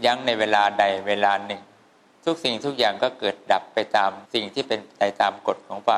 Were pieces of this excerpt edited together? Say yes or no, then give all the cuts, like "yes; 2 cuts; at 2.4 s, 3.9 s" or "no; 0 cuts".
yes; 1 cut; at 4.3 s